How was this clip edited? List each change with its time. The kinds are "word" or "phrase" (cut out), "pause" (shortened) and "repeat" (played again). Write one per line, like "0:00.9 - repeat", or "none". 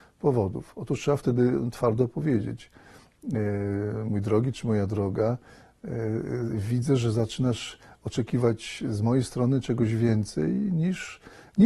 none